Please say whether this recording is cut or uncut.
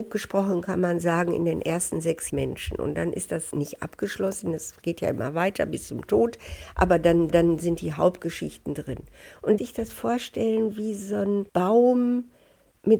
cut